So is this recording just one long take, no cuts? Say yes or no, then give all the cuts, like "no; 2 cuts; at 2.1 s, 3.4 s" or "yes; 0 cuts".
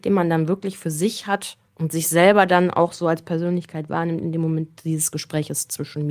no; 1 cut; at 1.7 s